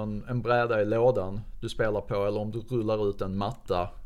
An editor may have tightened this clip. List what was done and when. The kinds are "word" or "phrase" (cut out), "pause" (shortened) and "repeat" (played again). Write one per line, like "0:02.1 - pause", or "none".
none